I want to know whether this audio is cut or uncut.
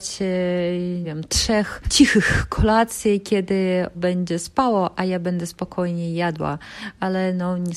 cut